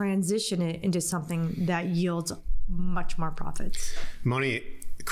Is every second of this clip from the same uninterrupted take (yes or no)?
yes